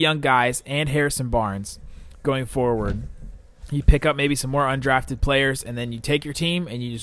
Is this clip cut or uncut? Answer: uncut